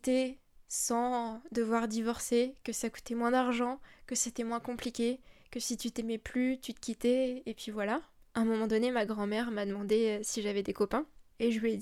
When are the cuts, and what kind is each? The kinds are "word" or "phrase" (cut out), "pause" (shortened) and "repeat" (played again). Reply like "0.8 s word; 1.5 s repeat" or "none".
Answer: none